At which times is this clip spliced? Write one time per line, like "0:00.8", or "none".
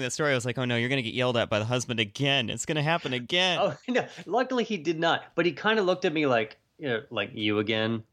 0:03.8

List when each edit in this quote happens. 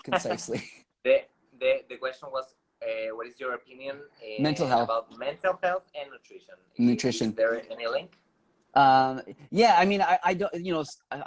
none

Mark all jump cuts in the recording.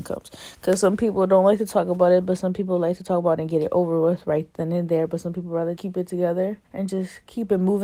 0:05.8
0:06.6

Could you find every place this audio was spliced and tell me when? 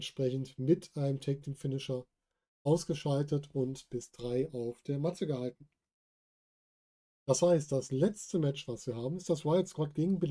none

